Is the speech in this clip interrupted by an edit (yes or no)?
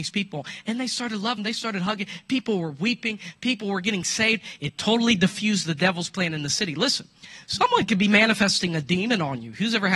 yes